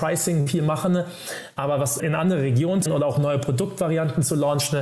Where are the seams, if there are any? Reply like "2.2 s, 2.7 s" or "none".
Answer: 2.0 s, 2.9 s

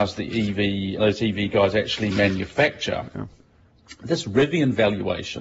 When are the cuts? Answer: 1.0 s

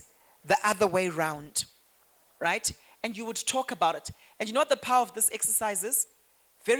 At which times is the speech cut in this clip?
none

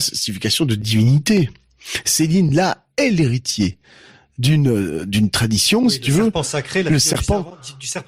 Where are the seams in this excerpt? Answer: none

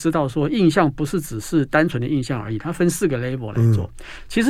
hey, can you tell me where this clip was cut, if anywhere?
none

